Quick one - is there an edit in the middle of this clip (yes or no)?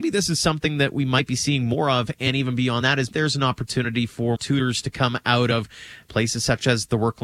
yes